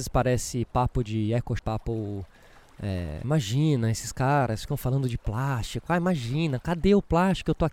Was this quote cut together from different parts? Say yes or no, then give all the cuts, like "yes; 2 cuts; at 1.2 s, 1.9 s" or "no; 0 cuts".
yes; 2 cuts; at 1.6 s, 3.2 s